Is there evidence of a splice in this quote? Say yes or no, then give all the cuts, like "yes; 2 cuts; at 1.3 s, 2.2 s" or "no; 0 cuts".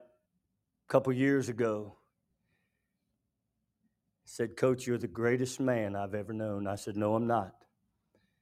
no; 0 cuts